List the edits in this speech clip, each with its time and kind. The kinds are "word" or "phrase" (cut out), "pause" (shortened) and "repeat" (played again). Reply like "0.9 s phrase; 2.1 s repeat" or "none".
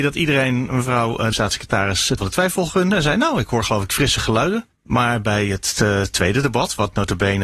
1.3 s phrase; 2.2 s word; 4.8 s pause